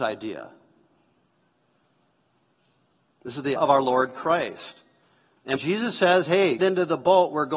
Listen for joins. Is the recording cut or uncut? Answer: cut